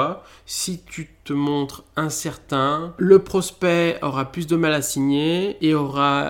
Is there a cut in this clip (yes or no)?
yes